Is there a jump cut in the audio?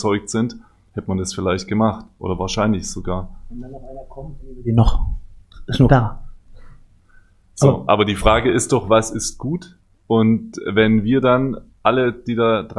yes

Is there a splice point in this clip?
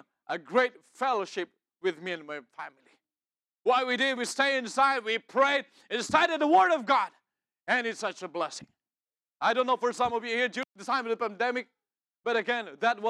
no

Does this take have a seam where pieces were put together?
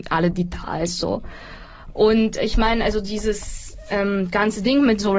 no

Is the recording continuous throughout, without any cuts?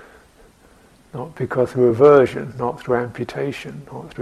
yes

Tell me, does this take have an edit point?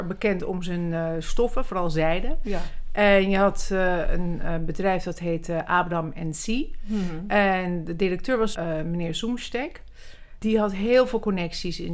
yes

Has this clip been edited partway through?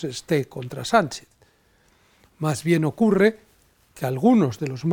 no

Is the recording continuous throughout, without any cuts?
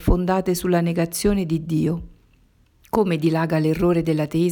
no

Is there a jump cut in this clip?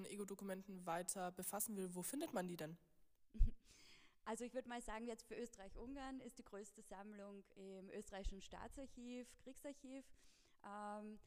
no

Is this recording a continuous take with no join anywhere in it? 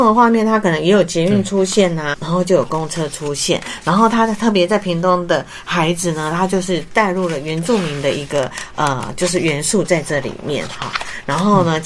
no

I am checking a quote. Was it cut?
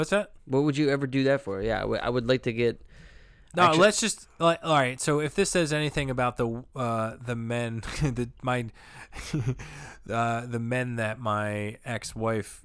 no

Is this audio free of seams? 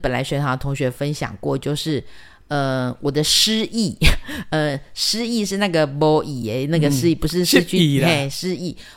yes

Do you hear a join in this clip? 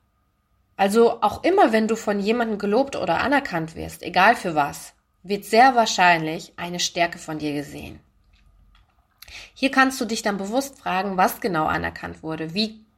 no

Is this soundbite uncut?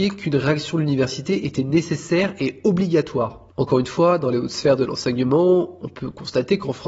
yes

